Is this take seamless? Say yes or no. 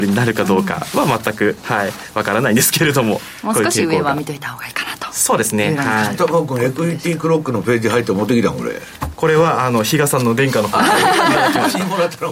no